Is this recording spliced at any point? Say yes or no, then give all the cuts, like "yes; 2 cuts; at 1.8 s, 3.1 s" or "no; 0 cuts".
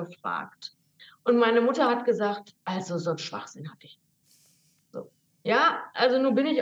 yes; 2 cuts; at 2.6 s, 5.3 s